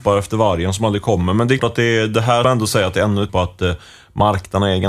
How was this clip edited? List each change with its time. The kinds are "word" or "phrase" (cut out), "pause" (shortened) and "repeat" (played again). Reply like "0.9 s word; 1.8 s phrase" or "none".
1.6 s word; 2.4 s phrase; 3.3 s word

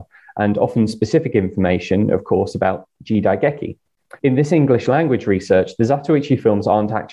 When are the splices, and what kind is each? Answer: 4.2 s pause

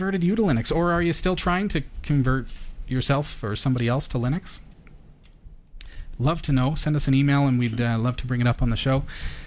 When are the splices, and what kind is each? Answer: none

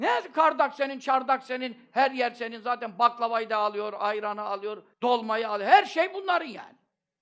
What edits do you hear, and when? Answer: 4.9 s pause

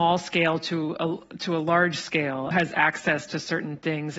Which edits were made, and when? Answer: 2.5 s phrase

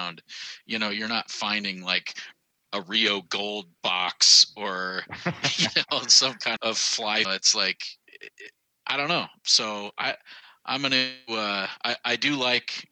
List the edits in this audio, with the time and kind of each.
6.6 s word; 7.2 s phrase

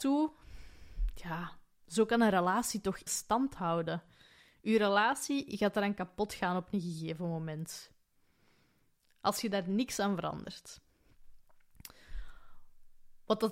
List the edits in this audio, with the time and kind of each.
3.1 s word

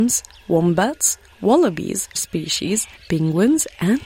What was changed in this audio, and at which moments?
2.2 s word; 3.0 s word

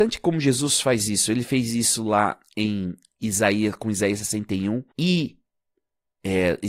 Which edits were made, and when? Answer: 4.9 s pause

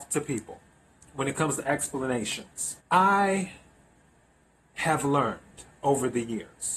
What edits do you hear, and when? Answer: 2.8 s pause

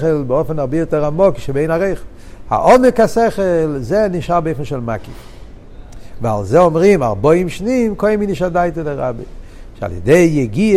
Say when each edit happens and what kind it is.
none

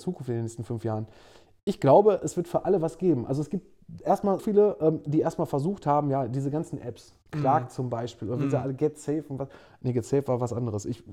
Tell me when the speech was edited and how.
4.4 s word

